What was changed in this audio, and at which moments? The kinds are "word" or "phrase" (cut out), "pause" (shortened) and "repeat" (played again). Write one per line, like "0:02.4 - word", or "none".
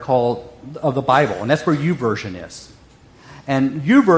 none